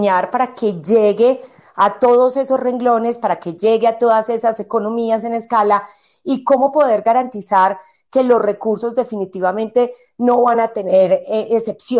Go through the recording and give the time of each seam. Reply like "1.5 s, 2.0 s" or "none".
none